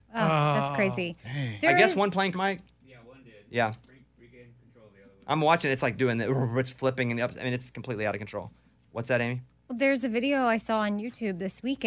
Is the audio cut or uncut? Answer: cut